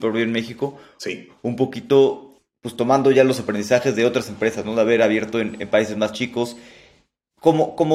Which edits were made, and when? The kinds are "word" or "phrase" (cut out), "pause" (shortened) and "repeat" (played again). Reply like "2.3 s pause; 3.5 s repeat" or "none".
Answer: none